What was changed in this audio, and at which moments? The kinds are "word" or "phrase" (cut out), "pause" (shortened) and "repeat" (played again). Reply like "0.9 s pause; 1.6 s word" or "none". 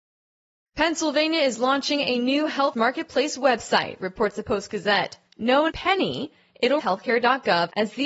2.7 s word; 4.4 s word; 5.7 s word; 6.8 s word

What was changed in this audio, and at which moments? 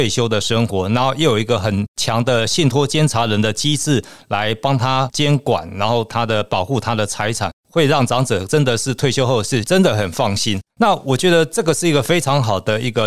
10.7 s pause

